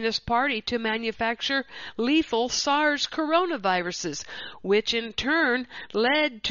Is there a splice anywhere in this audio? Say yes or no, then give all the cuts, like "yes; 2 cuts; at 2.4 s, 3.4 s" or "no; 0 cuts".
no; 0 cuts